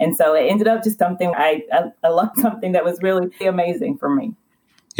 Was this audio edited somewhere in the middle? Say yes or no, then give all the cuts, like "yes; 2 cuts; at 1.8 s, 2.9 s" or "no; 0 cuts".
yes; 4 cuts; at 1.0 s, 1.3 s, 2.3 s, 3.4 s